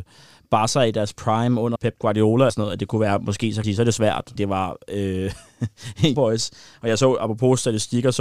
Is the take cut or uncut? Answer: cut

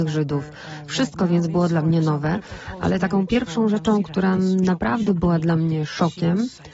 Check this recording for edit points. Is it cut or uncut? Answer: uncut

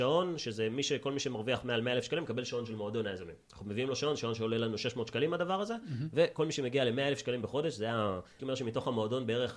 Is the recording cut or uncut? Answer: cut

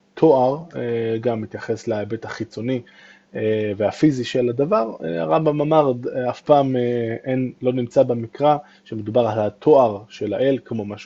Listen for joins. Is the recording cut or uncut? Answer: uncut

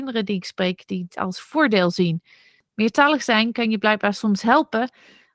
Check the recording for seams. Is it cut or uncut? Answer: cut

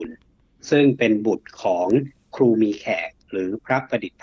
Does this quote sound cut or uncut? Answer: uncut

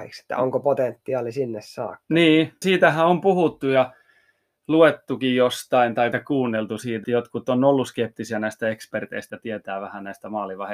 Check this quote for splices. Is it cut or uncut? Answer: cut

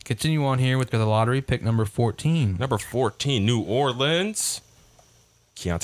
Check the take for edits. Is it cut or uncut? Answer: cut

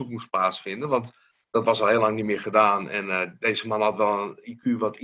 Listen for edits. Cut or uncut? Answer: uncut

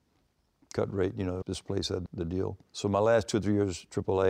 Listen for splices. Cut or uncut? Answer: cut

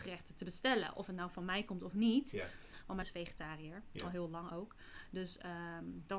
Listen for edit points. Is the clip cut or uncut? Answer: cut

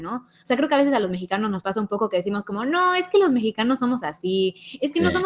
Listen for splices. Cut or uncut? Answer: uncut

